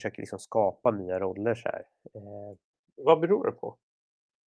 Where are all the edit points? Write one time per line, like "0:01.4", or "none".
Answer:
none

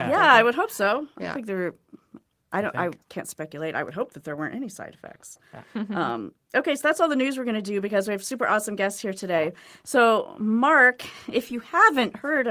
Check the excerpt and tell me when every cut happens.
0:03.0

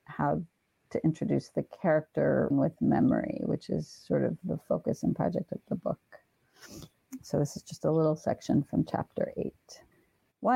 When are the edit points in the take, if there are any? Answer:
0:02.5

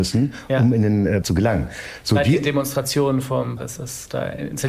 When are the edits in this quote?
0:01.2
0:03.6

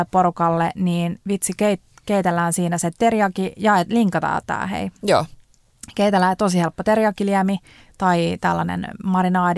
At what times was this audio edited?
none

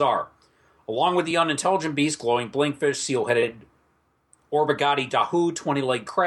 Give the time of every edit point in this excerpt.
none

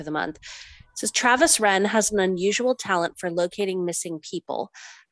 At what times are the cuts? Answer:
none

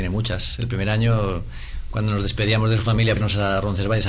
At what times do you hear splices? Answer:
0:03.2

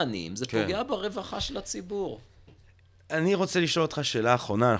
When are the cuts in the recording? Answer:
none

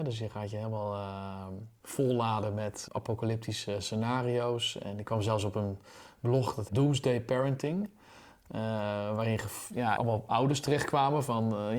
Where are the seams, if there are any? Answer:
0:06.7
0:10.0

